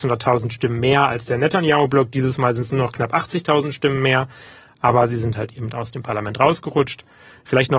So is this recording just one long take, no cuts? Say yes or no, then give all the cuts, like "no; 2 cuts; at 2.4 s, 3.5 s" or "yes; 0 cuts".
yes; 0 cuts